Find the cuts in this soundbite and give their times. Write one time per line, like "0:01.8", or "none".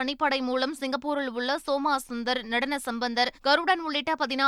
0:03.4